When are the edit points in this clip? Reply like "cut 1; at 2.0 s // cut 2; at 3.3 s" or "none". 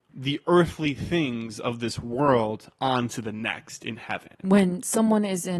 cut 1; at 4.3 s